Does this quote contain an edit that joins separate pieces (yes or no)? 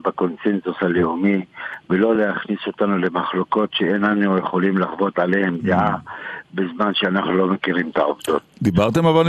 no